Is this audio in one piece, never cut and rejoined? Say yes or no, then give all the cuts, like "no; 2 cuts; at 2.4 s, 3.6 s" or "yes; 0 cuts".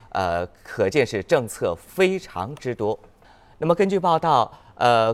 no; 1 cut; at 3.2 s